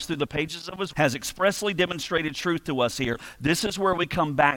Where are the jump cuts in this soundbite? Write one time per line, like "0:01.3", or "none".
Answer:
0:00.9

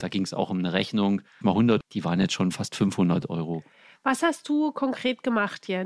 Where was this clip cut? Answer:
0:01.4
0:01.8

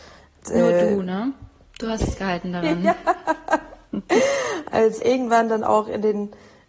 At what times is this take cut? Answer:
0:05.0

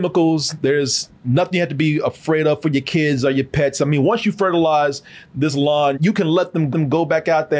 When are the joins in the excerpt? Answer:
0:05.9
0:06.7

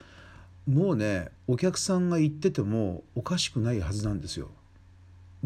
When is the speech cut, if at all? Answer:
0:01.4

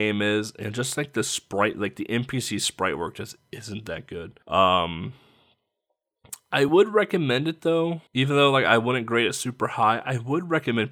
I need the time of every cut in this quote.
0:04.4
0:08.1

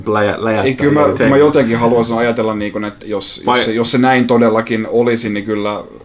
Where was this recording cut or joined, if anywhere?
0:03.0

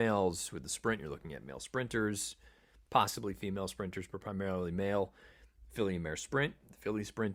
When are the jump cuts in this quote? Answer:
none

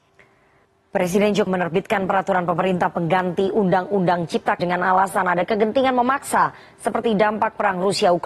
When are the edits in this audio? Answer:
0:01.5
0:04.6

